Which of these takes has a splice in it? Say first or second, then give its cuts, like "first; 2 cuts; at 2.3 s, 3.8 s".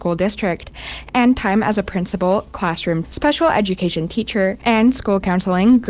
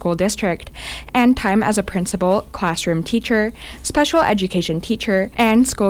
first; 1 cut; at 3.0 s